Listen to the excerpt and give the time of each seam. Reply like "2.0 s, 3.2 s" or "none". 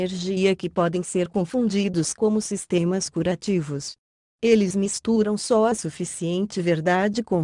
none